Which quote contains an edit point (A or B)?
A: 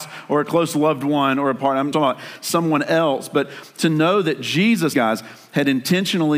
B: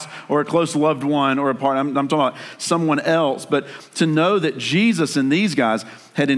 A